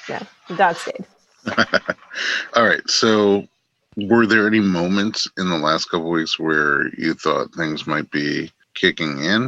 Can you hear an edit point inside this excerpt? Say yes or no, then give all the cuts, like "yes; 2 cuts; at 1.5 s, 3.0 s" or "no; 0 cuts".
no; 0 cuts